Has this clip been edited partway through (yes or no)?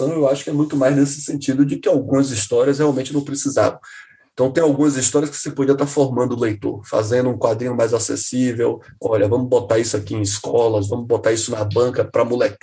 no